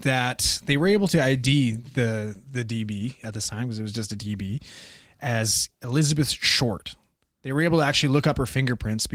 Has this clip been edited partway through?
no; 0 cuts

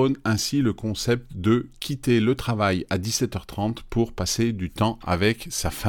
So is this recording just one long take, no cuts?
yes; 0 cuts

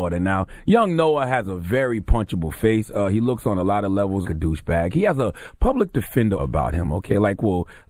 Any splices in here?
yes; 2 cuts; at 4.2 s, 6.4 s

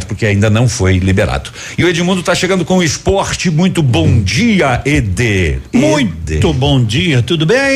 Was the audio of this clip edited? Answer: no; 0 cuts

